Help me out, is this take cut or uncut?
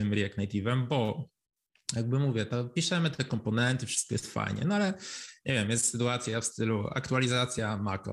uncut